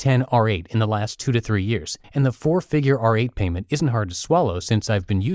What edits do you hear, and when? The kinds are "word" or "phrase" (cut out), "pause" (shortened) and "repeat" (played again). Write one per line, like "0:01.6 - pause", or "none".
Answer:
0:02.0 - pause

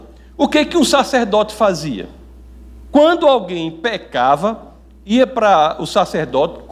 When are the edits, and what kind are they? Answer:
none

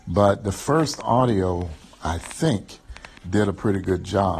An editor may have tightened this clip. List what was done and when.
0:03.2 - pause

